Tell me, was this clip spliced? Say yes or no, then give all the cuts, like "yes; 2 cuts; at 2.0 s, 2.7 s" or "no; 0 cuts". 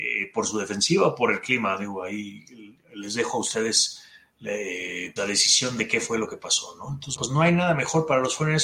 yes; 3 cuts; at 2.8 s, 5.2 s, 7.2 s